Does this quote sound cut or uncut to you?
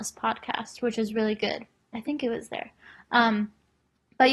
uncut